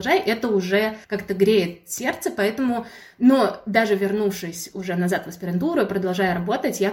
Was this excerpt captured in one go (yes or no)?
no